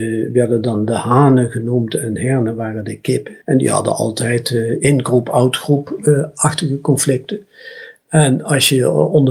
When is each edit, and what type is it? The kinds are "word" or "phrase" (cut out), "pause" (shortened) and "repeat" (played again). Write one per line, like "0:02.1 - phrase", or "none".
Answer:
0:03.4 - pause